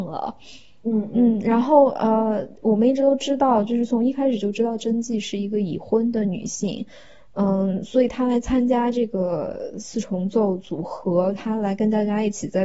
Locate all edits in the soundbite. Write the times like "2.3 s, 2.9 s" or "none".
none